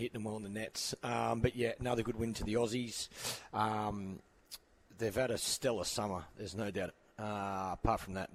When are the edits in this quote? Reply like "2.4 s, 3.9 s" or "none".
6.9 s